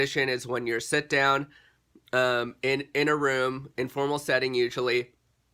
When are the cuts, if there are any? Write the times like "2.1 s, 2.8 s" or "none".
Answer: none